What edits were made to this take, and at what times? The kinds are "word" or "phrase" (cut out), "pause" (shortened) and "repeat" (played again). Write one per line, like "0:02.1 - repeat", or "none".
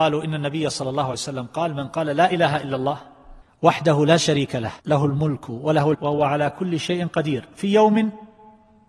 0:01.1 - word
0:03.4 - pause
0:04.8 - pause
0:05.9 - word